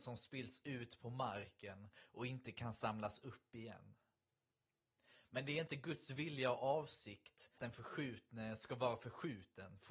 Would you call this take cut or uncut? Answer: cut